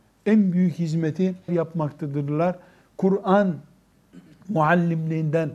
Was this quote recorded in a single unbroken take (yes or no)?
no